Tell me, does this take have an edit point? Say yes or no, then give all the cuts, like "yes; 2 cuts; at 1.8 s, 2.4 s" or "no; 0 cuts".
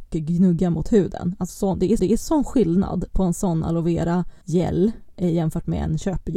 yes; 3 cuts; at 1.5 s, 2.0 s, 4.4 s